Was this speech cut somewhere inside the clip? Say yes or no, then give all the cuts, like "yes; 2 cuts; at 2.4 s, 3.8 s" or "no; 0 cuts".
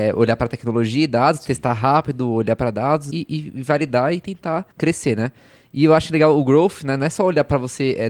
yes; 2 cuts; at 3.1 s, 4.7 s